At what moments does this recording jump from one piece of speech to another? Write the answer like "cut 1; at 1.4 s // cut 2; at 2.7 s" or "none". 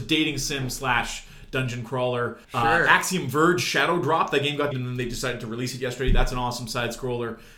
cut 1; at 2.4 s // cut 2; at 4.7 s